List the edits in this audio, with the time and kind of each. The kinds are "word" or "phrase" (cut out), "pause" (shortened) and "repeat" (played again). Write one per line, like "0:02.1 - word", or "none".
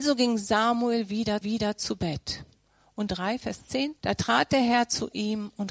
0:01.4 - repeat
0:03.1 - phrase
0:04.0 - pause